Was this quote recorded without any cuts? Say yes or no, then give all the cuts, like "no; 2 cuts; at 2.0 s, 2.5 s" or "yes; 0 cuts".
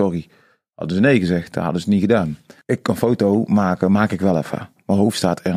yes; 0 cuts